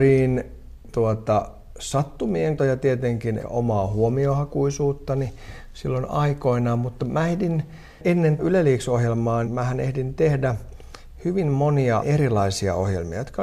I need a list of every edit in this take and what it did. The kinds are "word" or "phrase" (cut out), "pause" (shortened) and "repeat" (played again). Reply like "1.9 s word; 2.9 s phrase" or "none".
0.9 s word; 2.6 s word; 3.4 s word; 8.4 s word; 9.4 s word; 12.0 s word